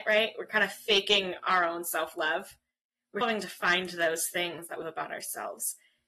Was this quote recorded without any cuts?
no; 2 cuts; at 3.2 s, 4.8 s

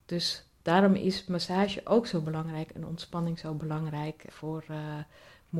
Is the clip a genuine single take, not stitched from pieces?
no; 1 cut; at 4.3 s

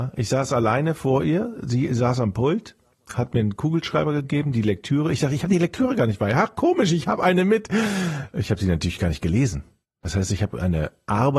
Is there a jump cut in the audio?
no; 0 cuts

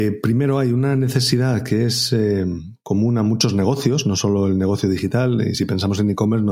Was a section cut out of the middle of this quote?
no; 0 cuts

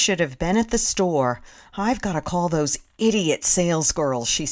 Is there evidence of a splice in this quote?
no; 0 cuts

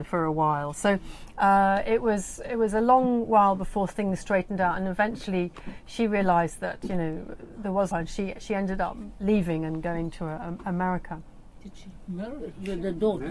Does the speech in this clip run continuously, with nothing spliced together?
no; 1 cut; at 7.9 s

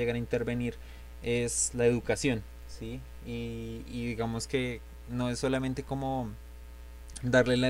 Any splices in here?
no; 0 cuts

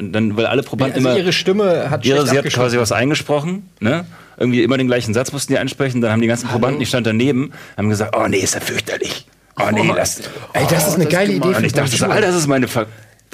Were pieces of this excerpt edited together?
no; 0 cuts

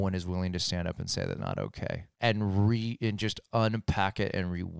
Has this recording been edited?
yes; 2 cuts; at 1.4 s, 2.1 s

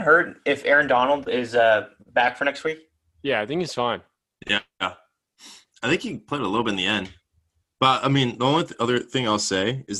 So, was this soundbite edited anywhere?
no; 0 cuts

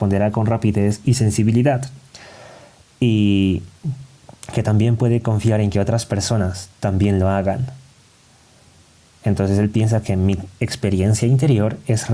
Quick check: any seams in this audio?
no; 0 cuts

